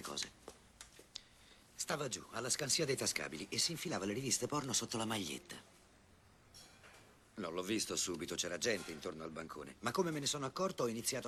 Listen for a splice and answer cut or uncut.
uncut